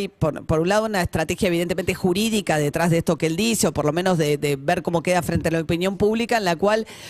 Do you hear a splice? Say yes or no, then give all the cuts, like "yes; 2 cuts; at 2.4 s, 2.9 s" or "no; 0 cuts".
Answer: no; 0 cuts